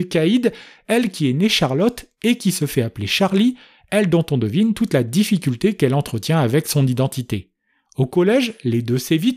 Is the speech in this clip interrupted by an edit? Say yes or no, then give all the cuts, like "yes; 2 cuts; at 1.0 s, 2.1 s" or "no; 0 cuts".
no; 0 cuts